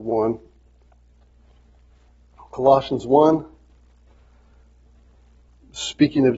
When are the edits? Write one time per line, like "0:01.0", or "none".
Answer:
none